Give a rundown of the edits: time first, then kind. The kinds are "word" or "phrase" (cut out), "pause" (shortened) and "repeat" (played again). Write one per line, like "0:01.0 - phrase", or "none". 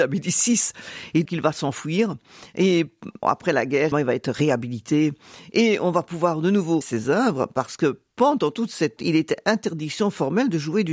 0:01.3 - word
0:03.2 - word
0:03.9 - word
0:06.8 - word
0:09.0 - word